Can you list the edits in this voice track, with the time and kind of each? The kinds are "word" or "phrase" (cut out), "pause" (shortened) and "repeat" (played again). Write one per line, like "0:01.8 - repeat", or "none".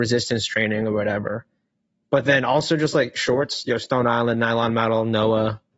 none